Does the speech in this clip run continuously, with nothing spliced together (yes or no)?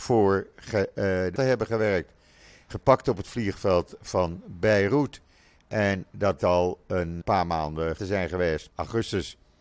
no